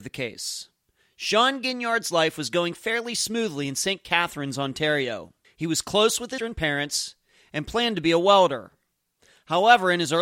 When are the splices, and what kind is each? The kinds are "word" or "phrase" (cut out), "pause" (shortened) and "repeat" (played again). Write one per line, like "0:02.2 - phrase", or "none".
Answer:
0:05.4 - pause
0:06.4 - word